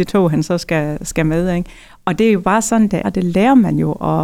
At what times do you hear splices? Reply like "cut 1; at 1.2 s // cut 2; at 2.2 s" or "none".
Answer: cut 1; at 3.0 s